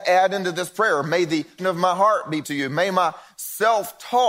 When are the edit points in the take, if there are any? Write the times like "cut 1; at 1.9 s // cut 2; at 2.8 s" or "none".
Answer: cut 1; at 1.6 s // cut 2; at 2.4 s

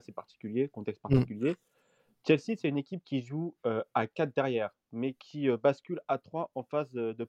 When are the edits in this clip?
none

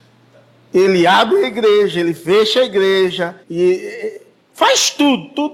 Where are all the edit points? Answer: cut 1; at 3.4 s

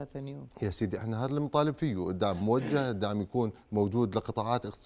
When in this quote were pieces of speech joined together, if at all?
cut 1; at 3.6 s

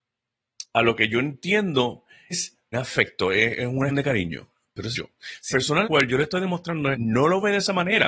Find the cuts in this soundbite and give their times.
cut 1; at 2.3 s // cut 2; at 2.7 s // cut 3; at 3.9 s // cut 4; at 4.9 s // cut 5; at 5.5 s // cut 6; at 5.8 s // cut 7; at 6.9 s

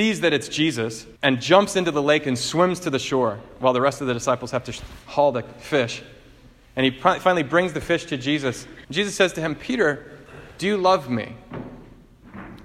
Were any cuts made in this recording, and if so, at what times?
cut 1; at 1.2 s // cut 2; at 8.8 s

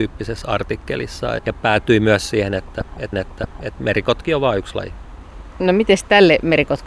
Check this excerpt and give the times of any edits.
cut 1; at 1.4 s // cut 2; at 3.1 s

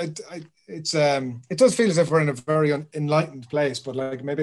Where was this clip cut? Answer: none

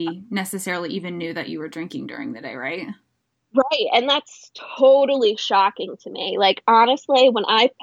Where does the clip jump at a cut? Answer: none

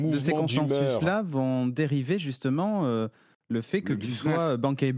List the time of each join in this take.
none

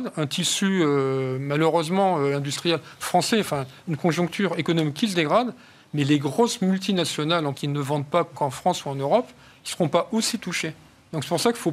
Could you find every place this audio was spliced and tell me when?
cut 1; at 7.5 s

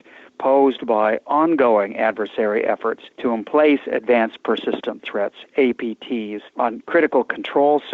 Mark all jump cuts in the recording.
cut 1; at 3.1 s // cut 2; at 6.5 s

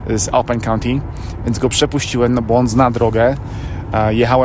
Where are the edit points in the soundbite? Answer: none

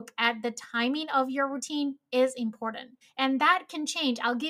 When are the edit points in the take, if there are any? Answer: cut 1; at 3.0 s

